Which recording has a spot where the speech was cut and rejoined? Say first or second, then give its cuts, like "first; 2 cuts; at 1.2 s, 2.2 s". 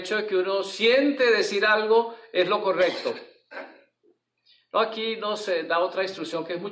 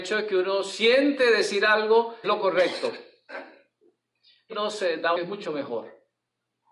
second; 3 cuts; at 2.2 s, 4.5 s, 5.1 s